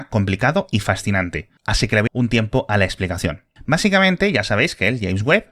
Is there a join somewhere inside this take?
yes; 1 cut; at 2.1 s

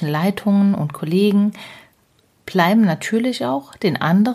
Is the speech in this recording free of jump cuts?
yes; 0 cuts

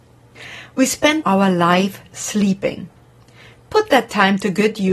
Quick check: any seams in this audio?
yes; 1 cut; at 1.2 s

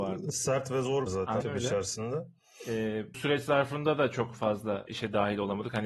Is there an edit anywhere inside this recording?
yes; 4 cuts; at 1.1 s, 1.4 s, 3.1 s, 4.9 s

